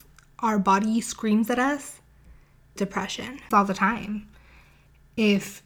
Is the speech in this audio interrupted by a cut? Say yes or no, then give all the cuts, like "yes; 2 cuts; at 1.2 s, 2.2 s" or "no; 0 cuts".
yes; 2 cuts; at 2.8 s, 3.5 s